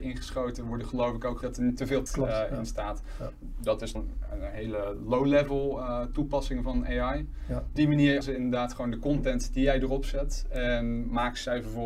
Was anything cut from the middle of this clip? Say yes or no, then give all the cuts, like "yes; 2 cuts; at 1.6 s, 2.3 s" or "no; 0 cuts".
yes; 5 cuts; at 1.4 s, 2.1 s, 3.9 s, 7.8 s, 8.2 s